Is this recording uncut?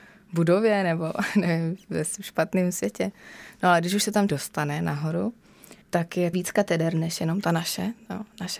no; 3 cuts; at 4.3 s, 5.8 s, 6.3 s

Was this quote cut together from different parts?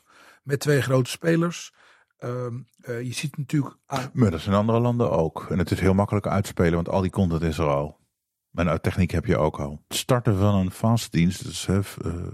no; 0 cuts

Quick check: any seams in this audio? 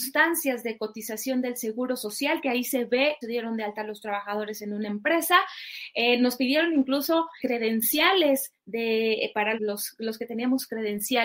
yes; 3 cuts; at 3.2 s, 7.4 s, 9.6 s

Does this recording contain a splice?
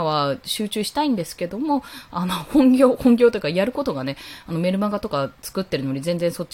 no; 0 cuts

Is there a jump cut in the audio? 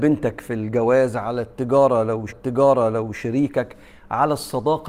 yes; 1 cut; at 2.3 s

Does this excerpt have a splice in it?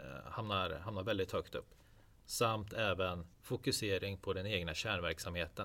yes; 1 cut; at 3.3 s

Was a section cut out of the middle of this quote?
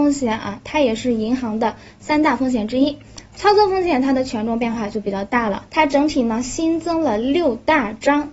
yes; 1 cut; at 5.7 s

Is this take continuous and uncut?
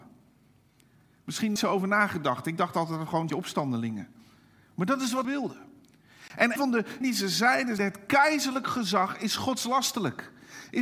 no; 6 cuts; at 1.6 s, 3.3 s, 5.2 s, 6.6 s, 7.0 s, 7.8 s

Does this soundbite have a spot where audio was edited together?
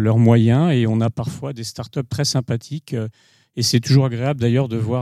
no; 0 cuts

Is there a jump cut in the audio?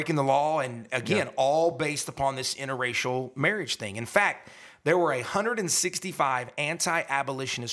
no; 0 cuts

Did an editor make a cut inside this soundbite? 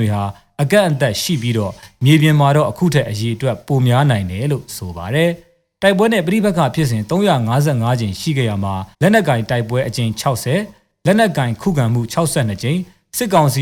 yes; 1 cut; at 8.9 s

